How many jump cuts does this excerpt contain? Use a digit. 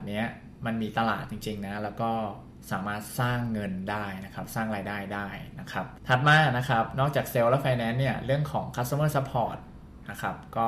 0